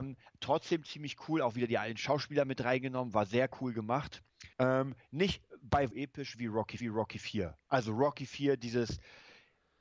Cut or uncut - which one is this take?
cut